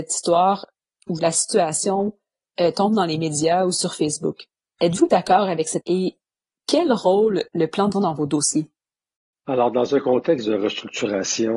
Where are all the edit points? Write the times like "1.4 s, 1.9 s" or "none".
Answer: 1.2 s, 5.8 s, 7.5 s, 7.9 s